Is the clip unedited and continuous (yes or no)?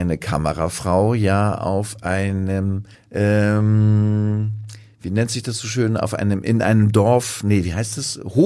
no